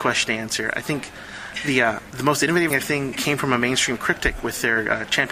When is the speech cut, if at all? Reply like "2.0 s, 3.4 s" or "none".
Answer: 2.1 s, 2.7 s, 3.1 s, 4.0 s